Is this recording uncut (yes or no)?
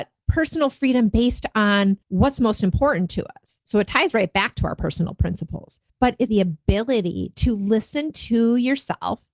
no